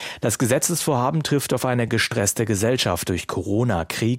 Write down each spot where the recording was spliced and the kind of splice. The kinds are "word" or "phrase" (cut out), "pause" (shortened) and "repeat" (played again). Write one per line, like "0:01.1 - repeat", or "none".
none